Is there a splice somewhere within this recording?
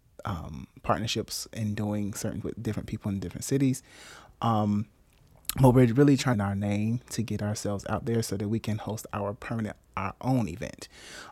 yes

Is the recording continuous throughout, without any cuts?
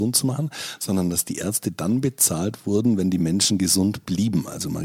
yes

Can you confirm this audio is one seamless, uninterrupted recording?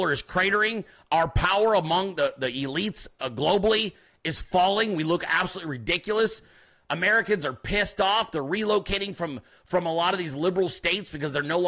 yes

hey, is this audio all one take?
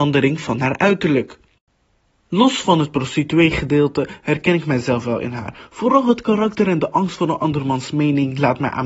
yes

